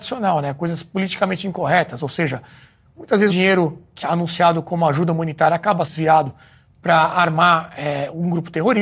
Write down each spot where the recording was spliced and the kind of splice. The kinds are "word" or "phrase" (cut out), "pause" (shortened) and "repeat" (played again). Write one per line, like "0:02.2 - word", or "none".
0:03.3 - word
0:04.0 - word
0:05.8 - word